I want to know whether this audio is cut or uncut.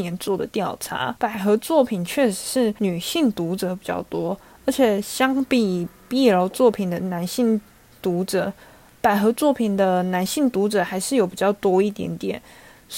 uncut